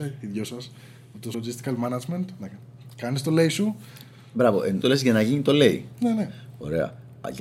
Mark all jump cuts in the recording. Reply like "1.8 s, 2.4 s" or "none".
1.3 s, 4.8 s